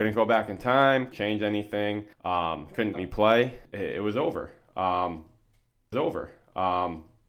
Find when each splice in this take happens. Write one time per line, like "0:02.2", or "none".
0:01.1
0:02.1
0:02.9
0:03.6
0:05.9